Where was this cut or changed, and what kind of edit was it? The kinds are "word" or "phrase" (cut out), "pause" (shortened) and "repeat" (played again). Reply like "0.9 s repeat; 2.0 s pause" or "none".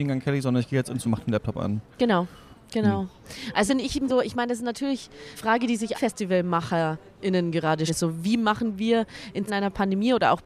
1.0 s word; 3.7 s word; 4.1 s word; 5.4 s word; 5.9 s word; 7.9 s word; 9.5 s word